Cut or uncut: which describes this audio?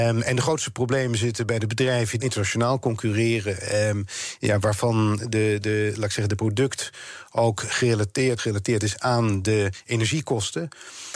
cut